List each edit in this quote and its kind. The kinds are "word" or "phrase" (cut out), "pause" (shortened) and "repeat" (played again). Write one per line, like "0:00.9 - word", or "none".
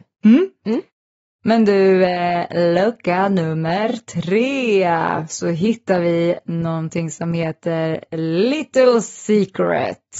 none